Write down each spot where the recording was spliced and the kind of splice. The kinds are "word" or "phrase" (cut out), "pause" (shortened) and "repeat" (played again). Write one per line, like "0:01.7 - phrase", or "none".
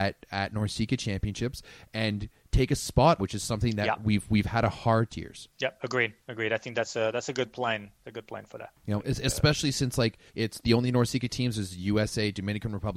0:03.2 - phrase
0:05.1 - phrase
0:05.5 - pause
0:10.3 - pause